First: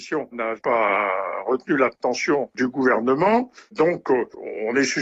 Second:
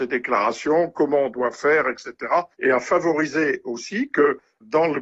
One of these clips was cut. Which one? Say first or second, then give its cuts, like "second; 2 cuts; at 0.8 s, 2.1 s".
second; 1 cut; at 2.5 s